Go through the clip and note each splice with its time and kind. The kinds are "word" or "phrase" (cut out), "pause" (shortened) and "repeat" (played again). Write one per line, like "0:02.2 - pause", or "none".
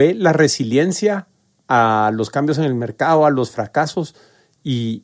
none